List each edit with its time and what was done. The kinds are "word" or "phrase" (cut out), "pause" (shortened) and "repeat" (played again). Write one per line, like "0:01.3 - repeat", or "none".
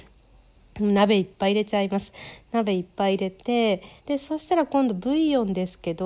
0:04.0 - pause

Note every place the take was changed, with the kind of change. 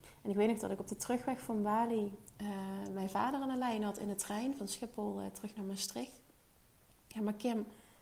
none

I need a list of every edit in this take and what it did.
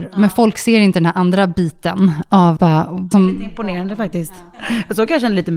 0:02.6 - word
0:03.1 - word

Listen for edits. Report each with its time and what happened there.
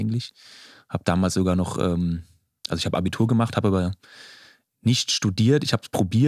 none

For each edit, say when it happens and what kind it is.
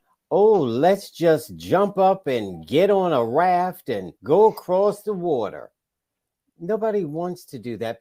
0:04.2 - pause

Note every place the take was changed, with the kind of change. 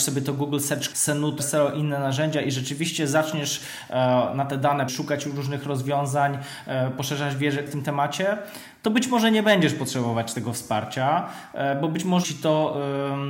0:00.9 - word
0:01.4 - word
0:04.9 - word
0:07.7 - word
0:12.2 - word

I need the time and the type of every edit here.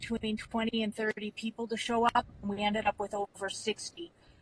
none

